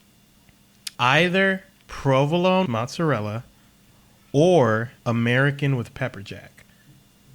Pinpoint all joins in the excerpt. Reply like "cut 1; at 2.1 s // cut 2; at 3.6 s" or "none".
cut 1; at 0.9 s // cut 2; at 2.7 s // cut 3; at 5.0 s